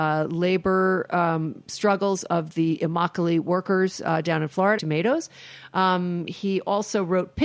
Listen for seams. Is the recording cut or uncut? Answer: cut